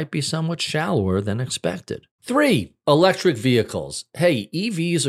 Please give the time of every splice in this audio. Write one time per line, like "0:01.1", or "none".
0:02.1